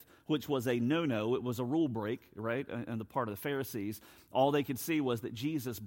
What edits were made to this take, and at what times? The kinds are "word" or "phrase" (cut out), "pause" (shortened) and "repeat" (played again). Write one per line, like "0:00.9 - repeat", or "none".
none